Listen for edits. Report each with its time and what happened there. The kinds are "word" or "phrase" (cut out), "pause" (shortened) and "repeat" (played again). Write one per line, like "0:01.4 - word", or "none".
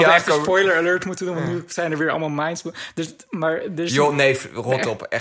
none